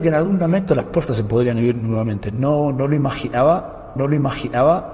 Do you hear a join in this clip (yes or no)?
yes